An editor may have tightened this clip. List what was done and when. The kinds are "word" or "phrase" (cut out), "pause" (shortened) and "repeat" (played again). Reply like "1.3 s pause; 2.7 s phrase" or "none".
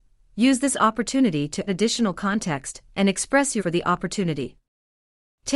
1.7 s word; 3.6 s word